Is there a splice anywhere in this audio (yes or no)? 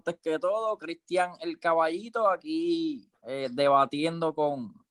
yes